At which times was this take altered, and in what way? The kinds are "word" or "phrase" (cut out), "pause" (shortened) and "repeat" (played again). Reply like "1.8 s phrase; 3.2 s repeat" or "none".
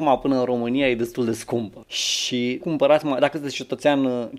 2.6 s word